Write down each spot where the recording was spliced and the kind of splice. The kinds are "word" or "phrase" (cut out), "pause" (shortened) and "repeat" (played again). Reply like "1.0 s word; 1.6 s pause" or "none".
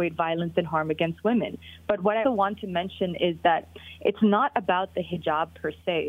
2.2 s word